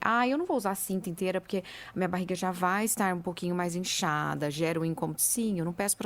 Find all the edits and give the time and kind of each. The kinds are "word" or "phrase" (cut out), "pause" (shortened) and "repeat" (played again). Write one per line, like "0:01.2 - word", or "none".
none

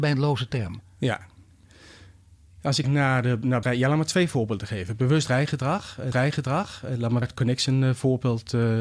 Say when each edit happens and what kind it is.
0:02.8 - word
0:03.6 - word
0:06.1 - repeat
0:07.2 - word

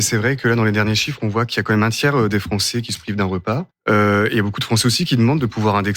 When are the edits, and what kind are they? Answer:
0:03.7 - pause

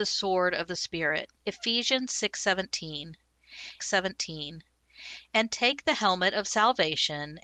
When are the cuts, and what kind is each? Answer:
0:01.4 - pause
0:03.8 - repeat

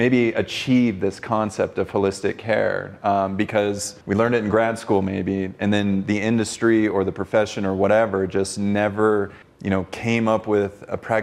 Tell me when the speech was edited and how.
0:04.0 - pause
0:09.4 - pause

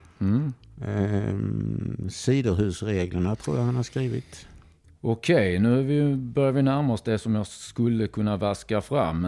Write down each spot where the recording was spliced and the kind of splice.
none

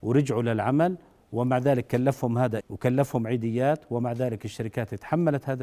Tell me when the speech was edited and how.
0:02.6 - word

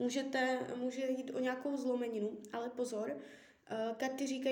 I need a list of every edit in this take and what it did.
none

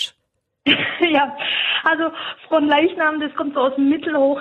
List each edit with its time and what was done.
none

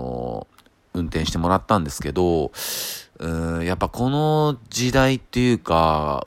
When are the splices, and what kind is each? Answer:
0:05.3 - pause

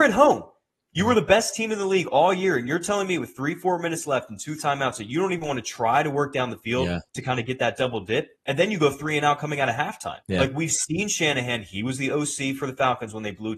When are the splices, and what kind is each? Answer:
0:04.6 - word
0:08.4 - pause
0:10.2 - pause

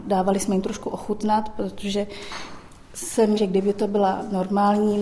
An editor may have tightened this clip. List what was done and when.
0:03.4 - word

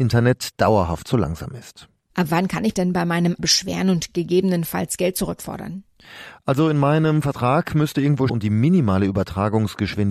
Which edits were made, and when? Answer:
0:02.7 - word
0:03.4 - word
0:08.3 - phrase

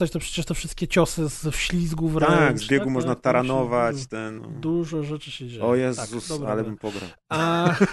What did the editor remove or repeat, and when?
0:01.4 - phrase
0:04.4 - word

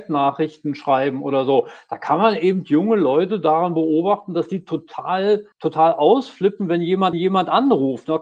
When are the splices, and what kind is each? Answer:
0:05.5 - pause
0:07.1 - repeat

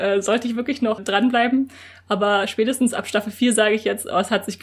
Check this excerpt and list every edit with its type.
0:01.0 - word

